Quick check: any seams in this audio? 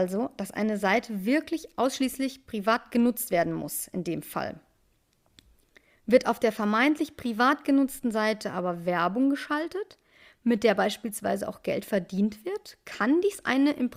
no; 0 cuts

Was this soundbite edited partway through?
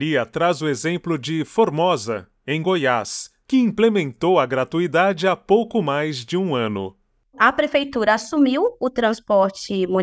no; 0 cuts

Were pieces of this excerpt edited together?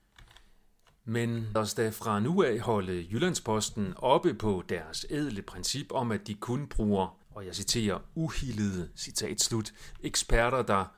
yes; 2 cuts; at 1.6 s, 7.2 s

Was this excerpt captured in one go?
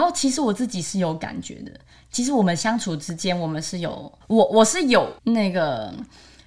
no; 2 cuts; at 4.2 s, 5.2 s

